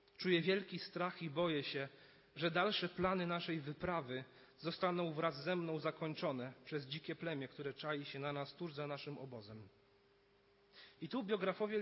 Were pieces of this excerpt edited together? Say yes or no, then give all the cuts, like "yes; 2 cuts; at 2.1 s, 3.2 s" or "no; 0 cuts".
no; 0 cuts